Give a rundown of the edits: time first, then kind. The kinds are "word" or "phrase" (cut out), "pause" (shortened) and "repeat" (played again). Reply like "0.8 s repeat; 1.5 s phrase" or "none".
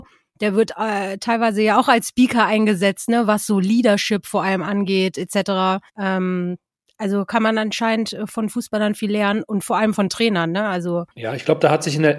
5.9 s pause; 11.1 s pause

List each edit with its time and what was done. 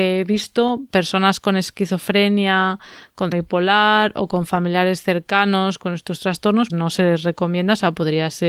3.3 s word; 6.7 s word

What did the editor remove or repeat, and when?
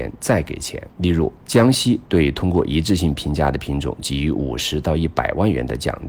0.9 s pause; 1.4 s pause

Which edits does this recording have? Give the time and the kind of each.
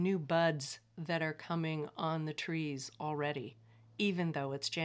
none

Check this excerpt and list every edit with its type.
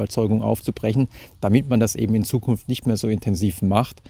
none

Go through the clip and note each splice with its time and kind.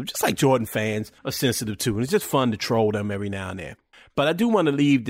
1.2 s pause; 3.9 s pause

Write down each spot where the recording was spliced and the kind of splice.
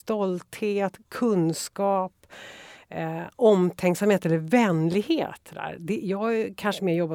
none

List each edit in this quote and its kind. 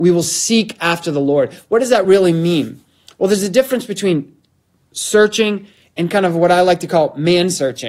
none

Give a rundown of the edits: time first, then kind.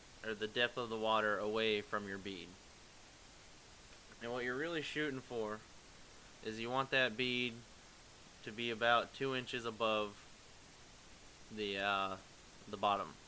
none

